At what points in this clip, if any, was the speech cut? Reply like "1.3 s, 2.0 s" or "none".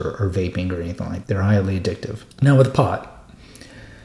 1.2 s, 2.3 s

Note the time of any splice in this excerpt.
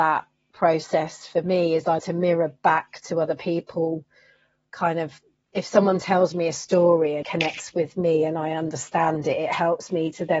2.0 s, 7.2 s

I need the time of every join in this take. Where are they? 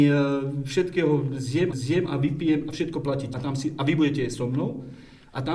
1.7 s, 3.3 s

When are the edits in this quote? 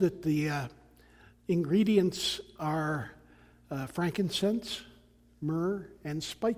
none

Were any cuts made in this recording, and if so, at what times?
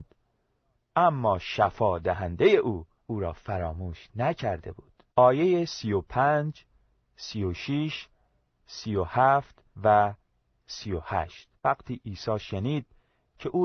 3.0 s, 5.1 s, 9.7 s, 11.6 s

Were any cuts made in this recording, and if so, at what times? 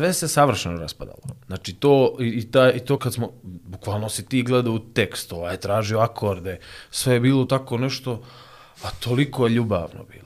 3.0 s, 7.5 s

